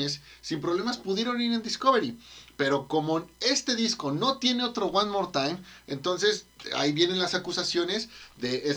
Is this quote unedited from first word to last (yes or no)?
yes